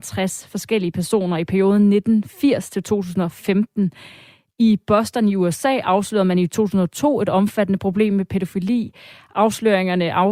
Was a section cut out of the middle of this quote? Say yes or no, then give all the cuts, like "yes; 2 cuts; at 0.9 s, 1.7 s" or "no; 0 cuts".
no; 0 cuts